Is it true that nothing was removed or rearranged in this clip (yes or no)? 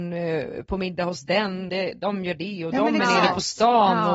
no